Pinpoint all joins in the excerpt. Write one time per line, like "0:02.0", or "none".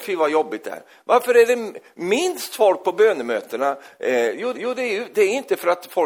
0:04.5